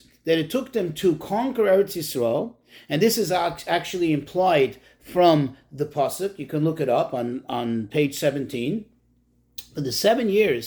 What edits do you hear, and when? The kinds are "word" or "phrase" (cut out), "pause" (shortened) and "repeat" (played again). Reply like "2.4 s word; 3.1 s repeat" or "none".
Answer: none

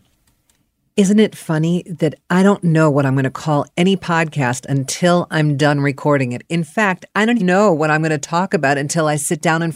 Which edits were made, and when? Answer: 7.4 s word

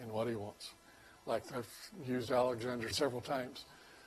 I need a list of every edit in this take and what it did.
1.4 s word; 2.9 s word

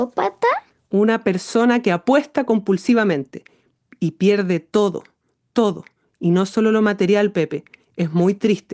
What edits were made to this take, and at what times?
none

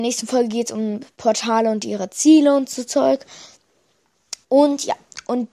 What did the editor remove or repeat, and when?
4.4 s pause

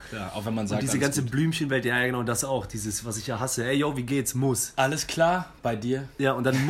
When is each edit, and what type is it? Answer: none

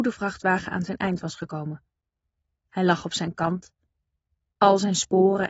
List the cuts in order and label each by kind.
none

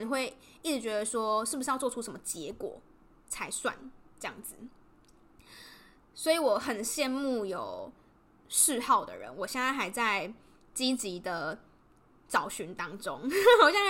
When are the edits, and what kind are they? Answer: none

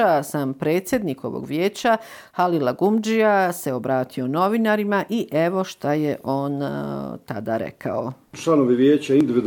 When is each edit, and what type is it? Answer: none

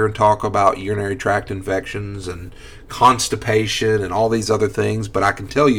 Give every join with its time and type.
none

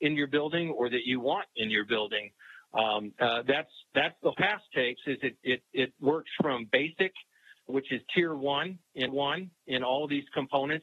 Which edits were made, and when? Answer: 3.9 s pause; 4.3 s phrase; 7.7 s word; 9.1 s repeat

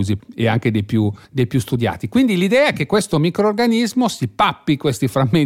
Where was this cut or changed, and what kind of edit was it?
none

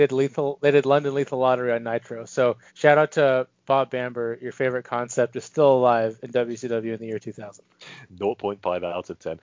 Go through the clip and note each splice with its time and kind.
2.7 s pause

